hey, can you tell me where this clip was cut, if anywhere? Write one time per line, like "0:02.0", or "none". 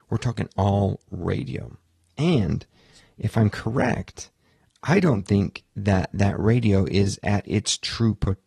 none